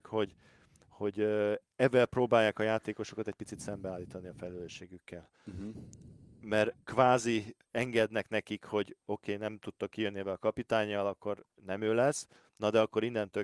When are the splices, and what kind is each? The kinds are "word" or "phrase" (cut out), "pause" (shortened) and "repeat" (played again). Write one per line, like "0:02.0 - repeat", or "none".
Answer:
0:06.8 - pause